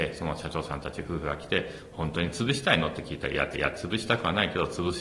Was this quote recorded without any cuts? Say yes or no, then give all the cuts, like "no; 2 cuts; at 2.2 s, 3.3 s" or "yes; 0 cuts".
no; 1 cut; at 3.5 s